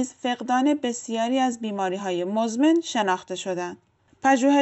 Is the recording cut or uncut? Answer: uncut